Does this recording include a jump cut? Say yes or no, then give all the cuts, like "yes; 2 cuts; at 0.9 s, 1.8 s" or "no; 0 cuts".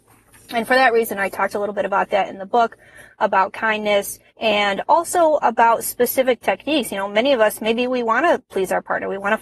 yes; 1 cut; at 4.3 s